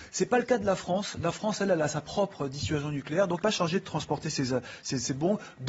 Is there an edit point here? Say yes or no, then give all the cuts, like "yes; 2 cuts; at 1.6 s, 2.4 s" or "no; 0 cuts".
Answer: yes; 1 cut; at 3.4 s